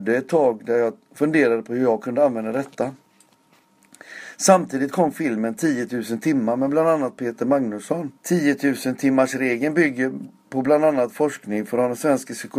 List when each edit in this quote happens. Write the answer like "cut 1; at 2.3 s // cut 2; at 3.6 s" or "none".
cut 1; at 8.2 s